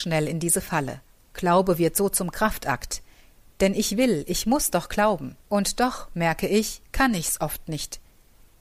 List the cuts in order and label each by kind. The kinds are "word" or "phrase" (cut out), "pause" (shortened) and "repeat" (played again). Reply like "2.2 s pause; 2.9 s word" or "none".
1.2 s pause; 5.4 s pause